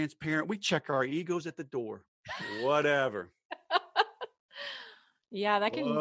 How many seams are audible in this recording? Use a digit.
1